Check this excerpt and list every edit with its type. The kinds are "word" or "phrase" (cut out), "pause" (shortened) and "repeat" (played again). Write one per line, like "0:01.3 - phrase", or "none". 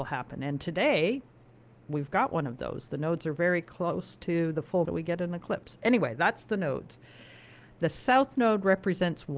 0:04.8 - phrase